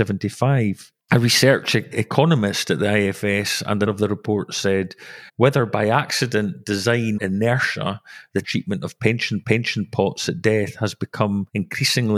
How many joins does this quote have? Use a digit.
6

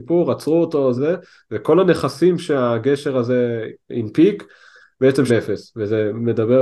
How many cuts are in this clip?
3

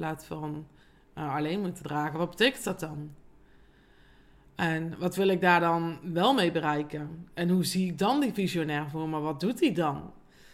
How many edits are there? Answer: 0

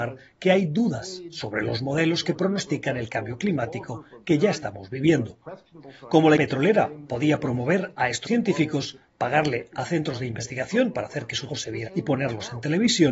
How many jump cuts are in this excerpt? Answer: 4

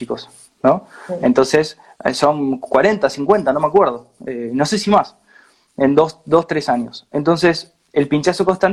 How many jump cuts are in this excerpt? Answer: 0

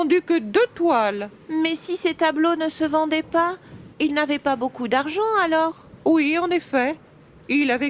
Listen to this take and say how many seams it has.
1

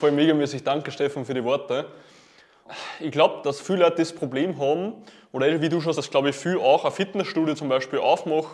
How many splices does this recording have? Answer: 2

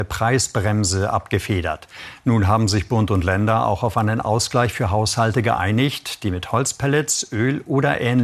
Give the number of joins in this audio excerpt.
0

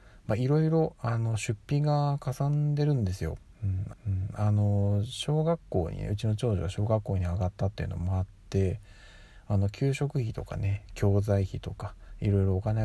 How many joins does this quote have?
1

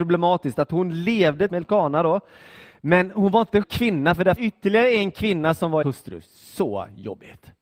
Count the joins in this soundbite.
4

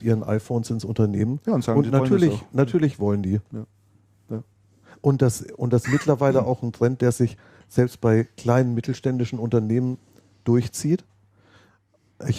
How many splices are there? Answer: 1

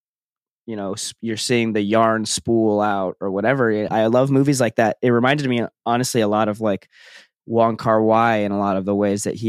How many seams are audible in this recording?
1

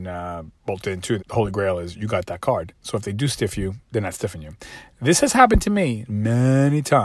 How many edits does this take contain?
2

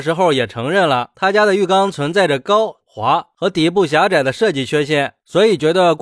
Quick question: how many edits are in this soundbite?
1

